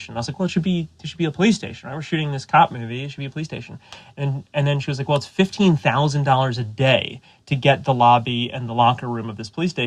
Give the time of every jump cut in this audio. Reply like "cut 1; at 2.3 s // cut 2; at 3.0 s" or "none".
none